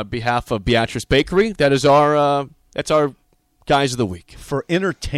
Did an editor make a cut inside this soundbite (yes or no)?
no